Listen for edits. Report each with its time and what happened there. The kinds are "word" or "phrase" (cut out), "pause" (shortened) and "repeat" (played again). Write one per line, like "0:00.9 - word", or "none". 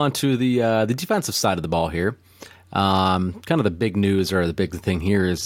none

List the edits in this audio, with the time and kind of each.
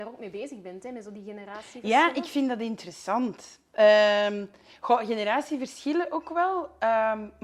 none

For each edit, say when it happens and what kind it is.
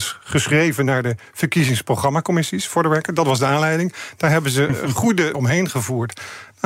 0:05.3 - word

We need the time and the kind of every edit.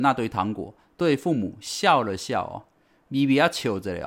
none

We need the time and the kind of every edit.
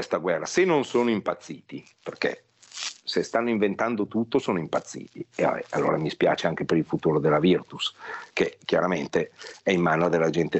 0:01.9 - pause

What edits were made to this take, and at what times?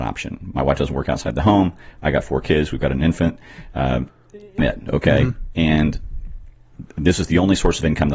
0:04.6 - word

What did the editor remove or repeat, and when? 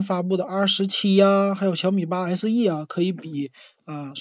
none

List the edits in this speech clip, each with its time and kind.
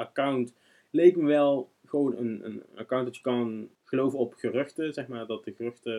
0:03.8 - pause

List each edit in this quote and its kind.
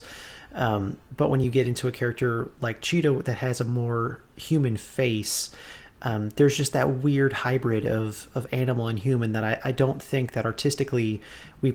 none

